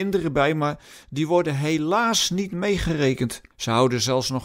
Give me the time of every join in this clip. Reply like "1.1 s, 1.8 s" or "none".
3.5 s